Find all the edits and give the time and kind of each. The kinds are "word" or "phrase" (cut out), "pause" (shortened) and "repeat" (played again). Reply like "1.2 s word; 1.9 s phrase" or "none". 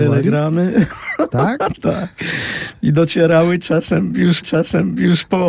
1.8 s word; 4.4 s repeat